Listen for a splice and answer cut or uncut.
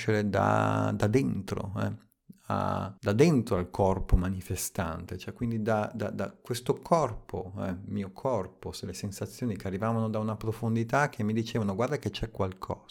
cut